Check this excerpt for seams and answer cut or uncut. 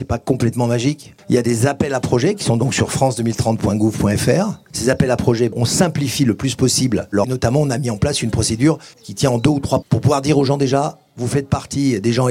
cut